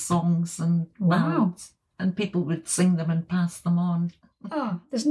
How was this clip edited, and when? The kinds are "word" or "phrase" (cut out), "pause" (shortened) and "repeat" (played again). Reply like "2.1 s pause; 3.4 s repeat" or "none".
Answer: none